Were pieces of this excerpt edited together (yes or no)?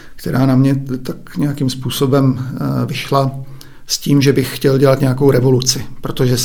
no